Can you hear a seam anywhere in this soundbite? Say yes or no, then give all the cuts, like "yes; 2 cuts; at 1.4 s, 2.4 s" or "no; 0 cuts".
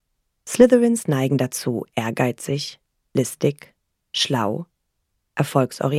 no; 0 cuts